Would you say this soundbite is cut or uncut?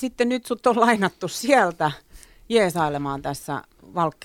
uncut